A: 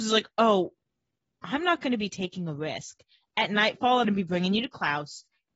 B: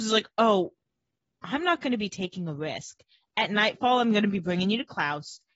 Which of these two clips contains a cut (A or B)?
A